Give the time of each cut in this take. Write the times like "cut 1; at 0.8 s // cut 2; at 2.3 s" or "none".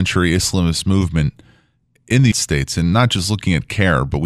cut 1; at 2.3 s